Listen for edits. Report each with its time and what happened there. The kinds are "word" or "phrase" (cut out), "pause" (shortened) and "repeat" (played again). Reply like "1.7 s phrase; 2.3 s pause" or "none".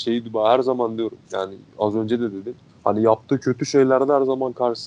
1.2 s pause; 2.7 s pause